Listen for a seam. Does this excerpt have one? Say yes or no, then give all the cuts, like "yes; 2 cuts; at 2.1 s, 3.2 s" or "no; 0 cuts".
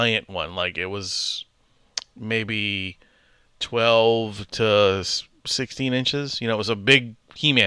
no; 0 cuts